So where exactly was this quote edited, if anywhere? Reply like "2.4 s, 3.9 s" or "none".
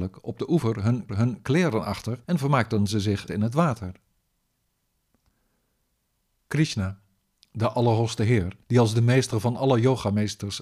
1.1 s, 2.2 s, 3.3 s, 8.6 s